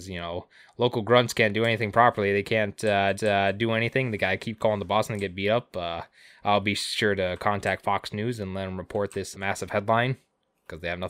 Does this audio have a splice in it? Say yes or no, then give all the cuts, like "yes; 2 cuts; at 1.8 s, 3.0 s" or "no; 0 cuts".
yes; 2 cuts; at 3.1 s, 9.3 s